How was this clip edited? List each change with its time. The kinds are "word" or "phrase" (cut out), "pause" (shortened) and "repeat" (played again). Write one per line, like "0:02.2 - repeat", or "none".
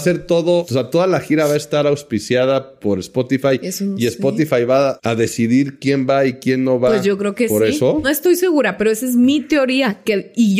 none